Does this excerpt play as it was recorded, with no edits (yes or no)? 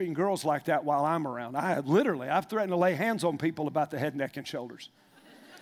yes